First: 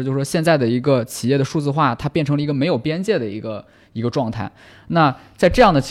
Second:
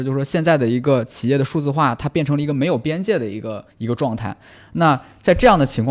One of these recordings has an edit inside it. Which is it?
second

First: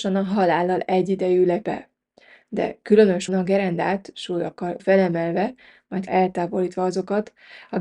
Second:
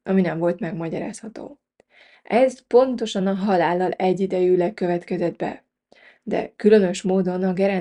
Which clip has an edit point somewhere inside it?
first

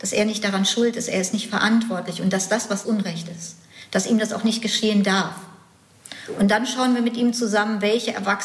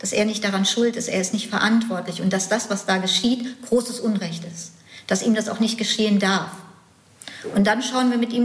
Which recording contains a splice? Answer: first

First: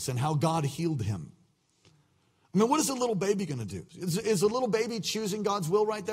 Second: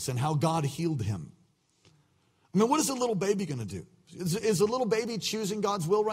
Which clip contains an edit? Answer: first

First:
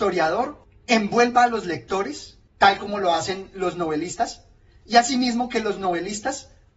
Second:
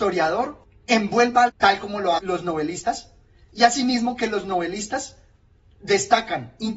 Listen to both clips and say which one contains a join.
second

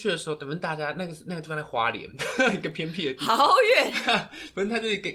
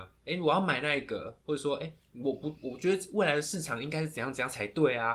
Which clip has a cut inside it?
second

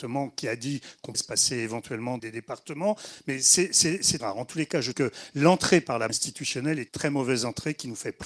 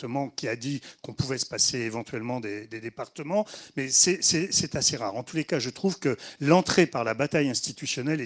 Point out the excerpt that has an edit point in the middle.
first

